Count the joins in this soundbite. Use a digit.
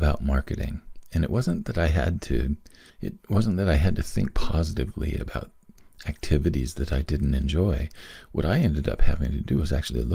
1